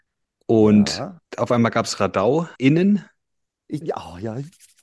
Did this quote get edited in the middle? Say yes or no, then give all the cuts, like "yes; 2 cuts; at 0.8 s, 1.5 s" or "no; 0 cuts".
yes; 3 cuts; at 1.2 s, 2.6 s, 3.8 s